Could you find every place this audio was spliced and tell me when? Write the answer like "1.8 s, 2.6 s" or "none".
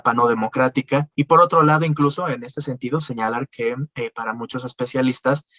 1.1 s